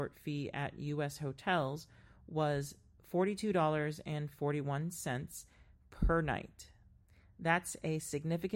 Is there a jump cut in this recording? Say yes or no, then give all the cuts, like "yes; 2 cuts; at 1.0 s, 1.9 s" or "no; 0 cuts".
no; 0 cuts